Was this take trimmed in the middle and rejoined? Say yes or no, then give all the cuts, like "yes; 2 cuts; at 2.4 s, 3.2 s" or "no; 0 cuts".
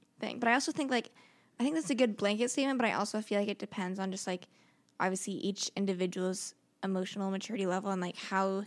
no; 0 cuts